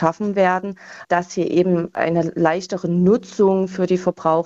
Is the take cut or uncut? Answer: uncut